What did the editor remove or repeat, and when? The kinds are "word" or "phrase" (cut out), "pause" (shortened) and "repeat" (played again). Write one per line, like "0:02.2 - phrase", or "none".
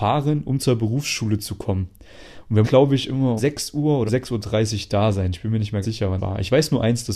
0:02.6 - word
0:03.4 - word
0:04.1 - word
0:05.8 - word
0:06.2 - word

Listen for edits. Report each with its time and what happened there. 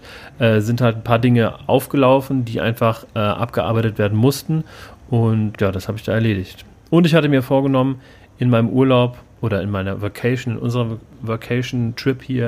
0:05.5 - word

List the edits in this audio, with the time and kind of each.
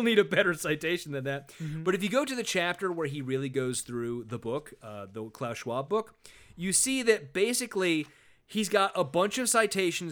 none

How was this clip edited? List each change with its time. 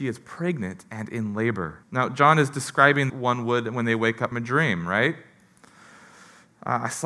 0:01.8 - pause
0:03.1 - phrase
0:04.3 - word

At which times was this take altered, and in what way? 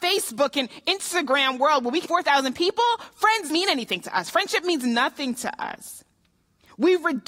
0:02.0 - phrase
0:03.5 - word

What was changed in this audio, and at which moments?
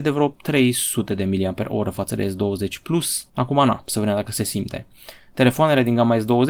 0:03.3 - pause

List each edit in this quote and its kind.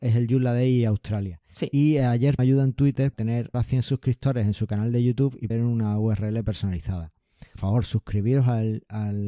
0:02.4 - word
0:03.1 - word
0:03.5 - word
0:05.5 - word
0:07.6 - word

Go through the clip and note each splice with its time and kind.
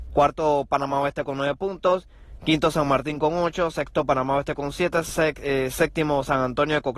none

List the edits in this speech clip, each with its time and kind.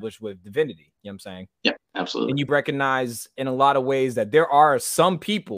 0:00.9 - pause
0:01.8 - pause
0:02.5 - word

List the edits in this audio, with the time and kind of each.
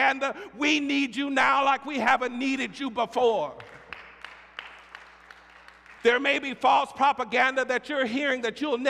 0:06.0 - pause

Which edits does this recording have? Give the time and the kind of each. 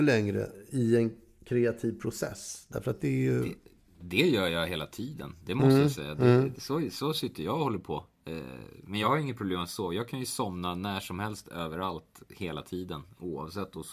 none

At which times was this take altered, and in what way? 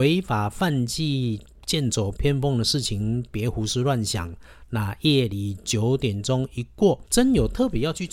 0:07.1 - pause

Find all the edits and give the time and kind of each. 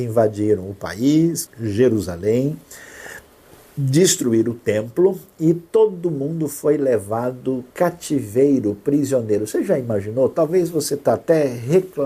0:01.5 - word
0:07.7 - pause

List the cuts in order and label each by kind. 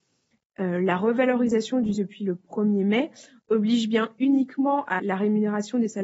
0:02.0 - word
0:05.0 - word

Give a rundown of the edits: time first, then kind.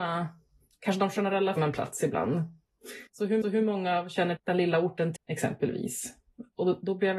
0:01.6 - phrase
0:03.1 - pause
0:03.4 - repeat
0:04.4 - word
0:05.2 - phrase

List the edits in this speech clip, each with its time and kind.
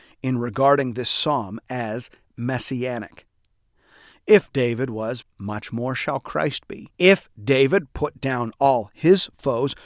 0:02.2 - word
0:05.2 - word
0:06.9 - pause

